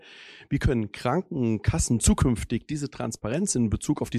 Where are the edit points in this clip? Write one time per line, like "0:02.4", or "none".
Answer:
none